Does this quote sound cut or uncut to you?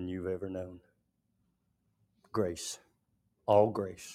uncut